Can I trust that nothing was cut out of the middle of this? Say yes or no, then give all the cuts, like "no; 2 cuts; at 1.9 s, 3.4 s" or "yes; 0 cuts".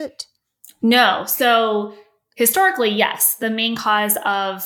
yes; 0 cuts